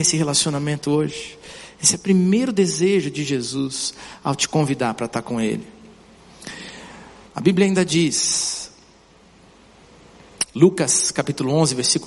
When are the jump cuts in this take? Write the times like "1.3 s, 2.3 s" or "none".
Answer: none